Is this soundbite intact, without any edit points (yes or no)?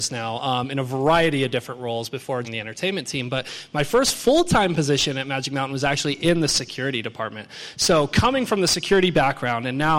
no